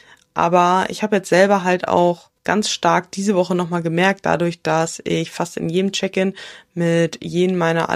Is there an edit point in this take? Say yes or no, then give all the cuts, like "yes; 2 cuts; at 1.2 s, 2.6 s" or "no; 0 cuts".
yes; 1 cut; at 2.4 s